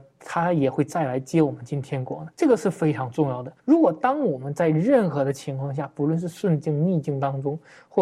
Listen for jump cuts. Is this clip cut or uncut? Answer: cut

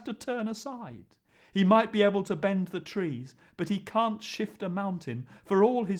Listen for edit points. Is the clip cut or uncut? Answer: uncut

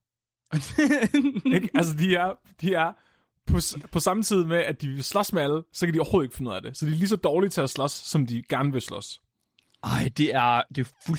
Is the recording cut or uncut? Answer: uncut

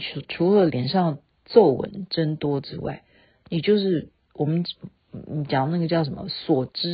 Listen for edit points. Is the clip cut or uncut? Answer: uncut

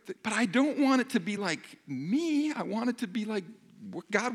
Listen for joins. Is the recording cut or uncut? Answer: uncut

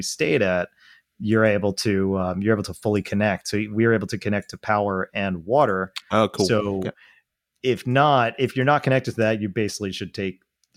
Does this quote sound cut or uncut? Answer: uncut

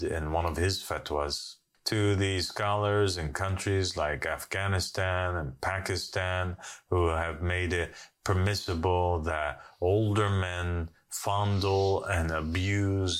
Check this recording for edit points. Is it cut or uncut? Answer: uncut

